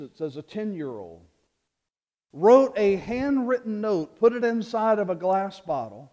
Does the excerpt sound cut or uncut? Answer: uncut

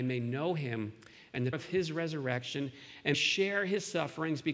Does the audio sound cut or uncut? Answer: cut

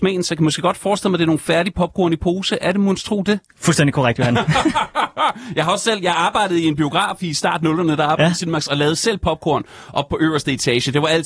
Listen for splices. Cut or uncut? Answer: uncut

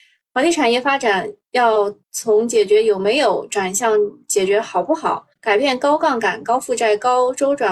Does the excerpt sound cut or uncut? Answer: cut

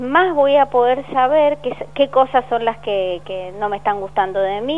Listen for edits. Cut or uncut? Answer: uncut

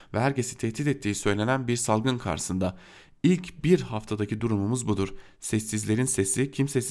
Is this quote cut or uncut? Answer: uncut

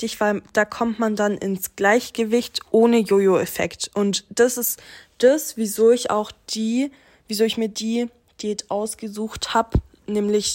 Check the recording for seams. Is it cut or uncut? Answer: uncut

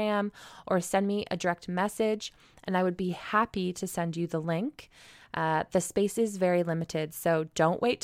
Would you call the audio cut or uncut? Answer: uncut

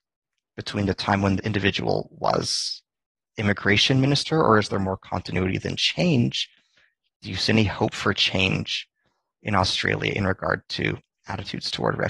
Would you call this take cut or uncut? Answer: cut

